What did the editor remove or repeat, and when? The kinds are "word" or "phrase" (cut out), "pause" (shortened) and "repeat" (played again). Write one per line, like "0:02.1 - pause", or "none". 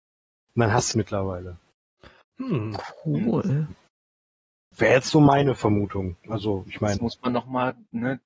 0:00.9 - phrase